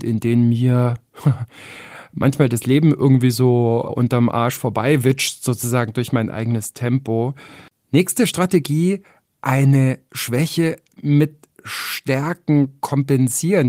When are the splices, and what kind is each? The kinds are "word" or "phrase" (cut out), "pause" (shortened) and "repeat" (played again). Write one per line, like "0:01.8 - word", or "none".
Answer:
0:03.9 - word